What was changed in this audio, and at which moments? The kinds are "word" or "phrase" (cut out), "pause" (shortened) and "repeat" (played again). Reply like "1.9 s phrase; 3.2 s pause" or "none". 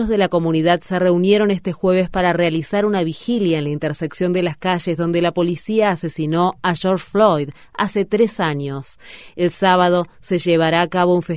none